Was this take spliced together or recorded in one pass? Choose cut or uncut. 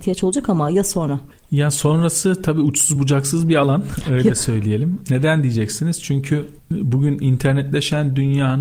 uncut